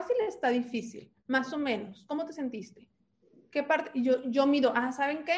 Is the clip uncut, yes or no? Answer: yes